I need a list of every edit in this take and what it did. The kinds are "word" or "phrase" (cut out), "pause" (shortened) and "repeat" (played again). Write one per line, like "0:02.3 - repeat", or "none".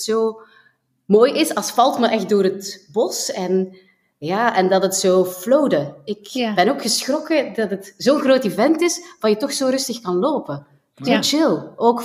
none

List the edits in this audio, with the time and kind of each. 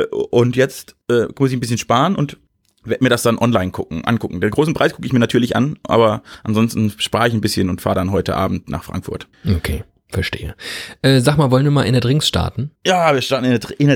0:01.0 - pause
0:02.5 - pause
0:09.3 - pause
0:12.8 - pause

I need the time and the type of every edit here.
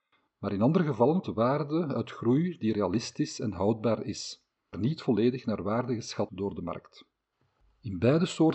0:01.2 - word
0:04.7 - word
0:06.3 - word

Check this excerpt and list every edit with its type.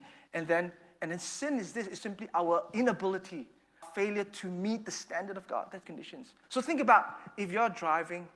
0:02.0 - word
0:03.8 - word
0:05.8 - phrase
0:06.4 - pause

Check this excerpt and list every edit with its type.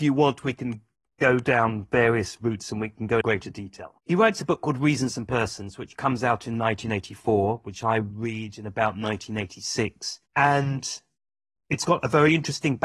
0:03.2 - word
0:04.0 - pause
0:10.3 - pause

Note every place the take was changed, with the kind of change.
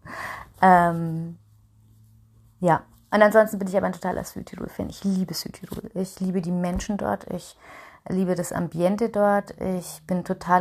none

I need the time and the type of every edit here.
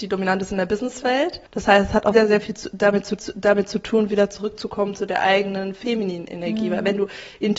0:01.5 - pause
0:02.1 - word
0:03.2 - repeat

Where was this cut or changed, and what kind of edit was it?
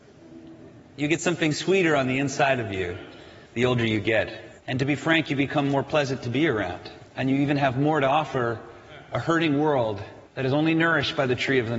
0:03.5 - pause
0:04.6 - pause
0:07.1 - pause
0:10.3 - pause

